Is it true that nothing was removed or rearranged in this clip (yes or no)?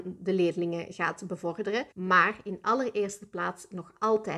no